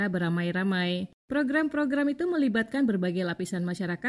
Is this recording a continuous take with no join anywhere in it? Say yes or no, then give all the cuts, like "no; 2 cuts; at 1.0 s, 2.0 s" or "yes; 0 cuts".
yes; 0 cuts